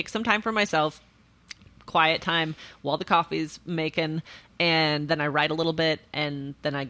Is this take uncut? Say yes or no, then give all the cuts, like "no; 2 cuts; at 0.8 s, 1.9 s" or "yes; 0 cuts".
yes; 0 cuts